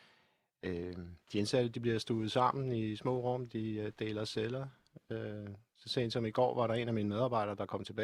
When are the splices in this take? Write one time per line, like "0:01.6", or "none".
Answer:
0:01.2